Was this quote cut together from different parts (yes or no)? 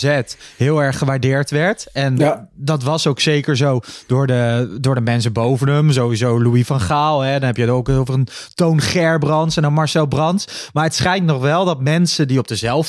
no